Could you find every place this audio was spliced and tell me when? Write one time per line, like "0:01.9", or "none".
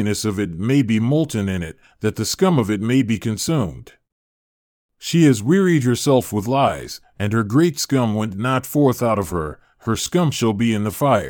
none